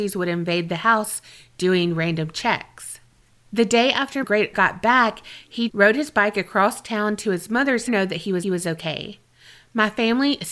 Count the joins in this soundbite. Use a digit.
5